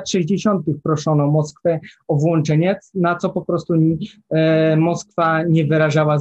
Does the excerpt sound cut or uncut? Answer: uncut